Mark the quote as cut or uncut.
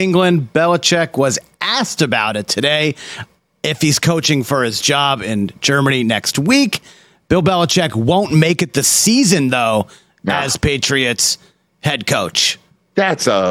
uncut